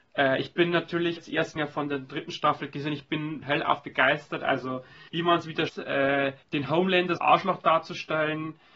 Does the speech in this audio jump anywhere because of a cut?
yes; 7 cuts; at 1.2 s, 1.6 s, 3.4 s, 5.1 s, 5.7 s, 6.4 s, 7.2 s

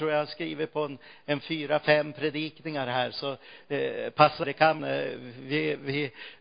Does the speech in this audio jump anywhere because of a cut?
yes; 2 cuts; at 4.4 s, 4.8 s

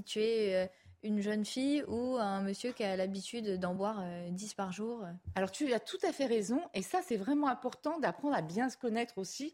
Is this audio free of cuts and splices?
yes; 0 cuts

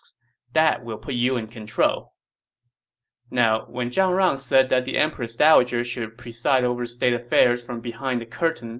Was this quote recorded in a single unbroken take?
yes; 0 cuts

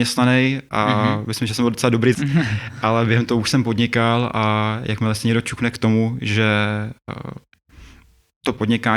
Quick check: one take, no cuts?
no; 1 cut; at 2.1 s

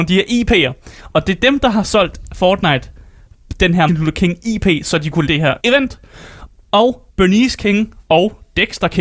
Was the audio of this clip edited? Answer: yes; 5 cuts; at 3.9 s, 5.3 s, 5.6 s, 7.1 s, 8.0 s

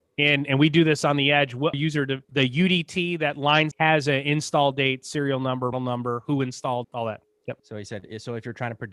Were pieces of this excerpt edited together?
yes; 6 cuts; at 1.7 s, 2.2 s, 3.7 s, 5.7 s, 6.8 s, 7.6 s

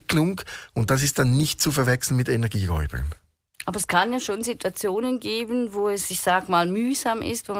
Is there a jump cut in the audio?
no; 0 cuts

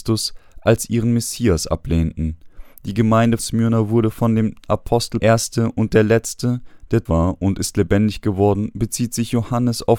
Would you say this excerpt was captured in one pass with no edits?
no; 3 cuts; at 3.4 s, 5.2 s, 7.1 s

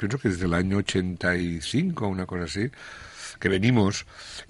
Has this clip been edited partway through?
no; 0 cuts

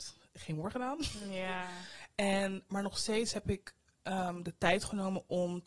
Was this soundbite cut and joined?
no; 0 cuts

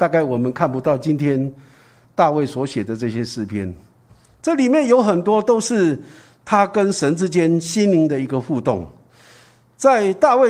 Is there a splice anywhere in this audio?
no; 0 cuts

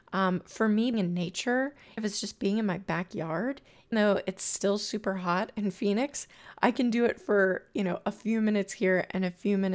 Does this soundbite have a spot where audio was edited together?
yes; 3 cuts; at 0.9 s, 2.0 s, 3.9 s

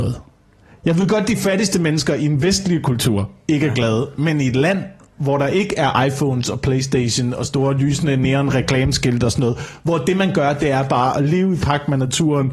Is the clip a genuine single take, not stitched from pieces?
yes; 0 cuts

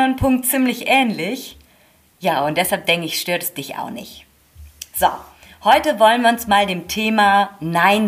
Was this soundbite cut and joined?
no; 0 cuts

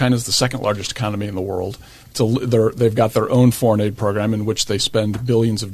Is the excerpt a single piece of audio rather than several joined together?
yes; 0 cuts

